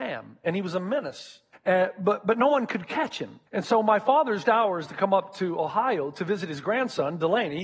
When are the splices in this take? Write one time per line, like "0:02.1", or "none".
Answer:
0:01.5
0:03.5
0:04.5